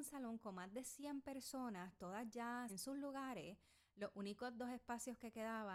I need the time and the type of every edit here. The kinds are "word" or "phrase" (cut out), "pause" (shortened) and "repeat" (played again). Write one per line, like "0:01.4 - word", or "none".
0:02.7 - phrase